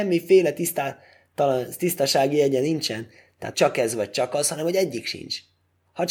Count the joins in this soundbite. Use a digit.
1